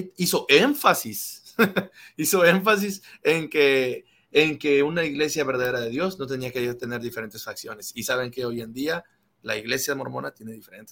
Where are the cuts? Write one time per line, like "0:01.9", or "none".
none